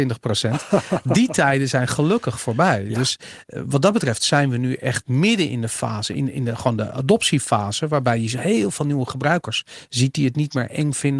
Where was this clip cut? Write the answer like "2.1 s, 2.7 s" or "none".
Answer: none